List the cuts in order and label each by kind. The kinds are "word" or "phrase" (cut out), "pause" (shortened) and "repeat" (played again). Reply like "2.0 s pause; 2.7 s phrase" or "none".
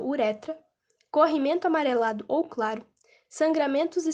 none